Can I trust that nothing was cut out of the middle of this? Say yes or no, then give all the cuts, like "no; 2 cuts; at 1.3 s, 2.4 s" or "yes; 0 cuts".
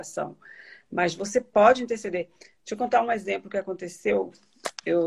yes; 0 cuts